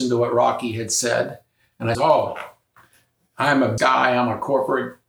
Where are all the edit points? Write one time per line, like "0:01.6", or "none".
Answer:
0:01.9
0:03.8

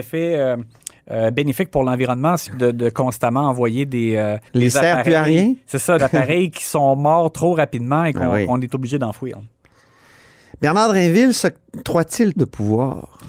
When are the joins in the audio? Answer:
0:02.5
0:04.5
0:06.0
0:12.4

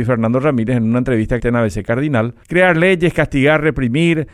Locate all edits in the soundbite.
0:01.4
0:02.4

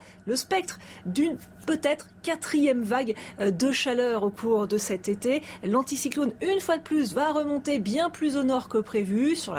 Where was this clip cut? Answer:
none

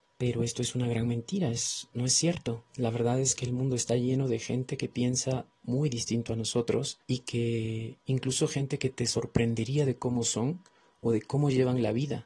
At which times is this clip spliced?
0:01.9
0:02.7
0:07.0

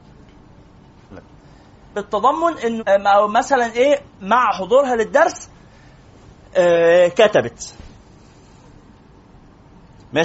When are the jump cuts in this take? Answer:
0:01.1
0:01.9
0:02.8

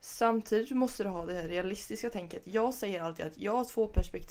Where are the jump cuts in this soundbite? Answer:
none

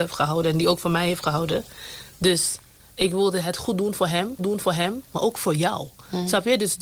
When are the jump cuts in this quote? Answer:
0:04.4

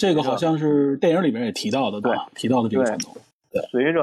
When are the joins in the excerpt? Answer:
0:02.0

